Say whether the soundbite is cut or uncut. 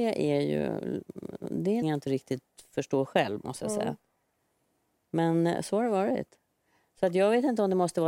cut